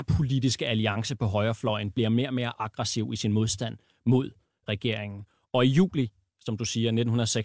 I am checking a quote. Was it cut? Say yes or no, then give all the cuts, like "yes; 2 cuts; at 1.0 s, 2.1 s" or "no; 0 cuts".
no; 0 cuts